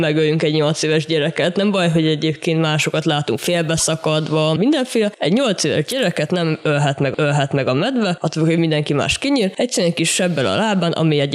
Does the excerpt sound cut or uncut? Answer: cut